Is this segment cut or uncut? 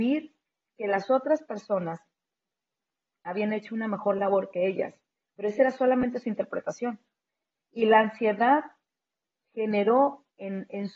uncut